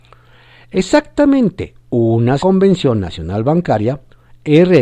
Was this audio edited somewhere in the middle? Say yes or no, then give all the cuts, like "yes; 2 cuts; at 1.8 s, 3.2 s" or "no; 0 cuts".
yes; 1 cut; at 2.4 s